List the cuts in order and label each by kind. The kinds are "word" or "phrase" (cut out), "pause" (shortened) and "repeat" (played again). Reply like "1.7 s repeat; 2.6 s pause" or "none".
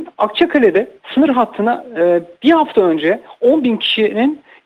none